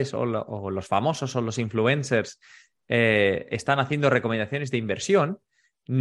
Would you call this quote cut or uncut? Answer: uncut